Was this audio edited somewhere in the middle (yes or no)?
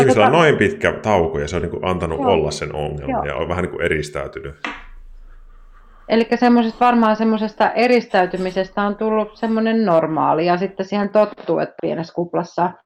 yes